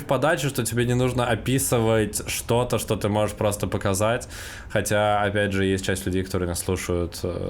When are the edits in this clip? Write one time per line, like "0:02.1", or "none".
none